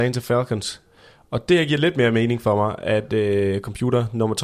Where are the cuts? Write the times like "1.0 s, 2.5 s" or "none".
none